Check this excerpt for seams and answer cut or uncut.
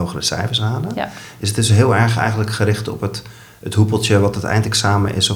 uncut